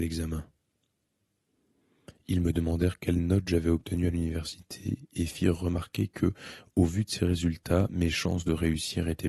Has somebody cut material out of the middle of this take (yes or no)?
no